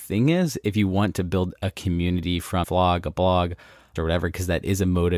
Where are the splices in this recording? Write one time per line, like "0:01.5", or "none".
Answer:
0:02.6
0:04.0